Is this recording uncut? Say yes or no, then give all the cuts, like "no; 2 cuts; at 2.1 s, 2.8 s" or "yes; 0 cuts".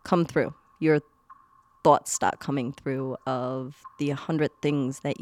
yes; 0 cuts